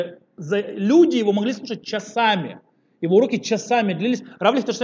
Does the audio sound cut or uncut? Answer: uncut